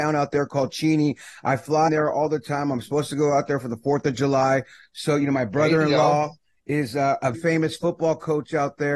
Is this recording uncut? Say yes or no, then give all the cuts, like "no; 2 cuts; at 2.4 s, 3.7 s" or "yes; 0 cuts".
no; 2 cuts; at 1.9 s, 7.3 s